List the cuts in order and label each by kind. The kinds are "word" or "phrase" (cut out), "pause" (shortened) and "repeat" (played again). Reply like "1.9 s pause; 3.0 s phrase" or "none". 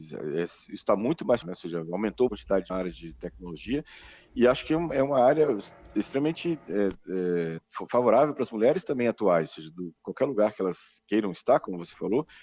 1.4 s word; 2.3 s phrase; 2.7 s phrase; 7.6 s word